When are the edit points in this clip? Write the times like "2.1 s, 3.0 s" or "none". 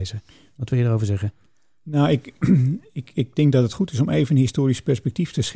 none

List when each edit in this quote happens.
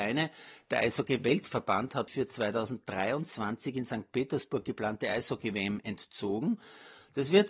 2.1 s

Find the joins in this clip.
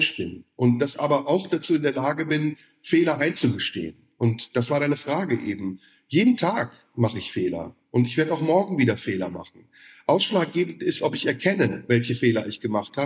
0.9 s

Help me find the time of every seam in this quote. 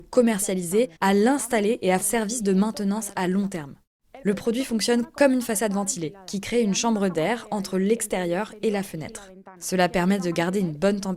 1.0 s, 2.0 s

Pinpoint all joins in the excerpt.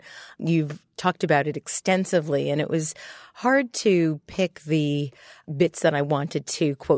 none

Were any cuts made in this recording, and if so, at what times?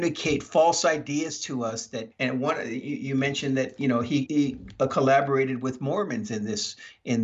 2.1 s, 4.3 s

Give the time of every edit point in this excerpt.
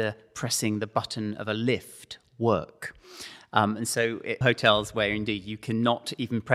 4.4 s

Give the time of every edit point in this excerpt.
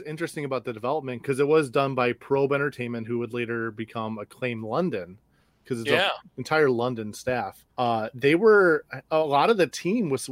7.7 s

